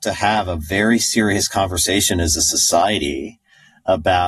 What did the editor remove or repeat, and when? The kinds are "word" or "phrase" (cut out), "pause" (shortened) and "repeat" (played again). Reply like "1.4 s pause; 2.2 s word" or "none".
none